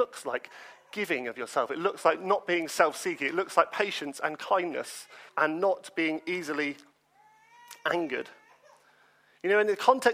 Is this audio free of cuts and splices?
no; 1 cut; at 5.3 s

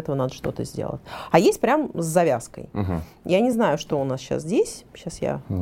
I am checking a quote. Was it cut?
no; 0 cuts

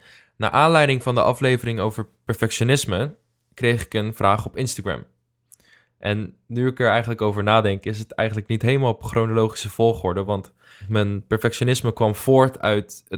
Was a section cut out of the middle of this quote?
no; 0 cuts

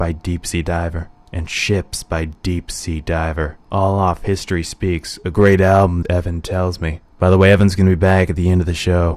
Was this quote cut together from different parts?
yes; 4 cuts; at 1.2 s, 3.6 s, 6.0 s, 7.1 s

